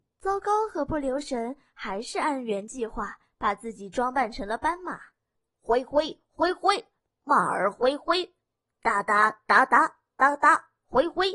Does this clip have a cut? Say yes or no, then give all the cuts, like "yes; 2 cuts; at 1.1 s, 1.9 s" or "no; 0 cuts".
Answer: no; 0 cuts